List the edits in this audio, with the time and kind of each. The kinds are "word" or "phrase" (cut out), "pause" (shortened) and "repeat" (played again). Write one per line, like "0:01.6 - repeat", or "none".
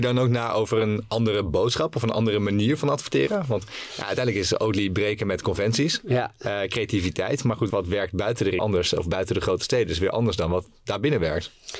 0:07.7 - word
0:08.6 - phrase